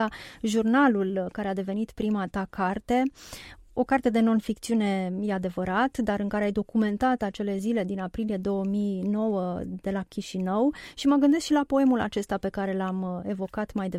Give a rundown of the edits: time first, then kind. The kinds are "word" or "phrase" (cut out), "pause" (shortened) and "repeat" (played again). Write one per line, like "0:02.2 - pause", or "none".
none